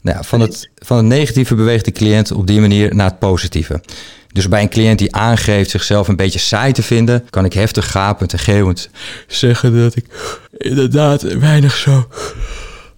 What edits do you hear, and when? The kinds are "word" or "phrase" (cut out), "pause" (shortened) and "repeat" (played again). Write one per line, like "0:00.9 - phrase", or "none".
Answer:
0:07.3 - pause
0:10.5 - pause